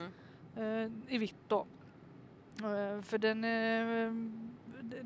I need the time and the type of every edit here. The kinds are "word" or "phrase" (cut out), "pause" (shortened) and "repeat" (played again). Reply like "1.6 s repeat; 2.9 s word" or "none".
none

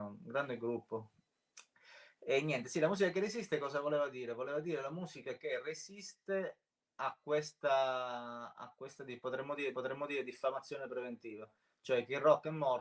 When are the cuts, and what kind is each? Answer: 9.7 s repeat

